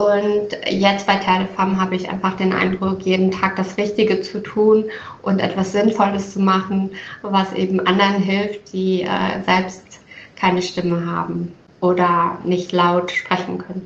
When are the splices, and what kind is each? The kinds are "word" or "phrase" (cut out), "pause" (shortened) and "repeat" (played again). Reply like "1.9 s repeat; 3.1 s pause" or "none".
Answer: none